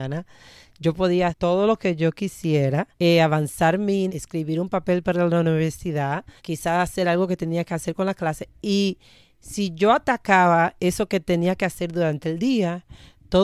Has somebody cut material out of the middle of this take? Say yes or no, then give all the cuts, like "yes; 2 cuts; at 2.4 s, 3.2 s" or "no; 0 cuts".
yes; 4 cuts; at 1.3 s, 2.9 s, 4.1 s, 6.4 s